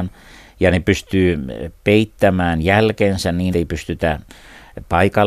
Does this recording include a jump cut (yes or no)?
yes